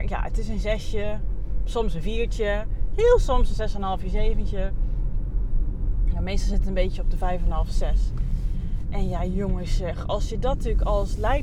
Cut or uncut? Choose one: uncut